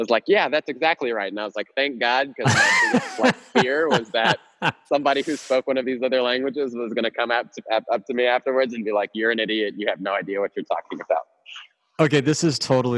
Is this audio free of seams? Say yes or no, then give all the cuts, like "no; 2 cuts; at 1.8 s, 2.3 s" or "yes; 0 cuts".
yes; 0 cuts